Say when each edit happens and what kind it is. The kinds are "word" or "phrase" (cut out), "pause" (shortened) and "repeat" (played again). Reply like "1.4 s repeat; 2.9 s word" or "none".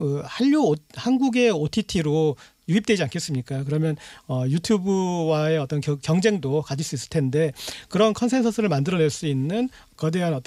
none